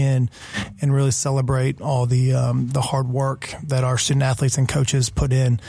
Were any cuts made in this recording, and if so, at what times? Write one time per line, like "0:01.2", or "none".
none